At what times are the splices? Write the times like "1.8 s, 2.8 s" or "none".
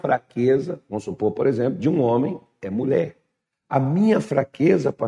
none